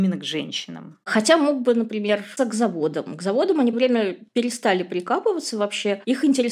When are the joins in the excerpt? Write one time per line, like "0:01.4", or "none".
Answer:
0:02.4
0:03.7
0:04.3